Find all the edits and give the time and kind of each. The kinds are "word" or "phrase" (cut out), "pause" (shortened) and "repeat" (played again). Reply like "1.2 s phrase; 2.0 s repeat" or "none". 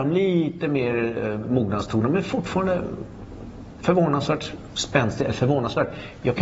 none